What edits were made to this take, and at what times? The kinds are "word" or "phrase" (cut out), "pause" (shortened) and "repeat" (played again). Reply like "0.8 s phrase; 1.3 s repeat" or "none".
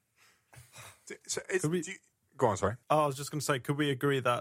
2.1 s pause; 2.8 s pause